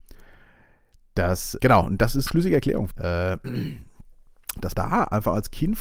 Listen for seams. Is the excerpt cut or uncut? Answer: cut